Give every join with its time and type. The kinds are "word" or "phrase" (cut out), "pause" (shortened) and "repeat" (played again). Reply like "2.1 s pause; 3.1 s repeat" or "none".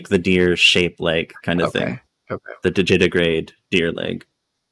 none